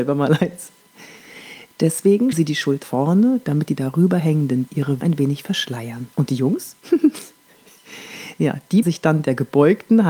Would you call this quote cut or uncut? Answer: cut